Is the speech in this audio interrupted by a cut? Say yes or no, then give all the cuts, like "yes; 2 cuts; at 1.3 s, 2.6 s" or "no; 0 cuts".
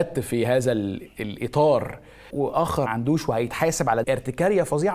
yes; 3 cuts; at 2.3 s, 2.9 s, 4.0 s